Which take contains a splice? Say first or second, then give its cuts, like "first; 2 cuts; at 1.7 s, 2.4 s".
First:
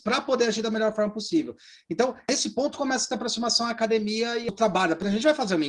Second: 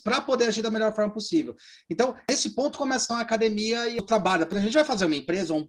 second; 1 cut; at 3.1 s